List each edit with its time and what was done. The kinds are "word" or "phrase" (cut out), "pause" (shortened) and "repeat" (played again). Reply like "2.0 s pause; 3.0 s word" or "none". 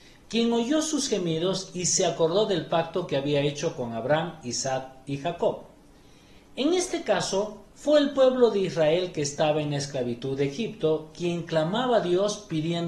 7.7 s pause